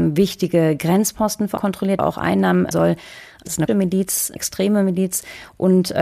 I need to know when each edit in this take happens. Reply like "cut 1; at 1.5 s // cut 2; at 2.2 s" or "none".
cut 1; at 1.6 s // cut 2; at 2.0 s // cut 3; at 2.7 s // cut 4; at 3.7 s // cut 5; at 4.4 s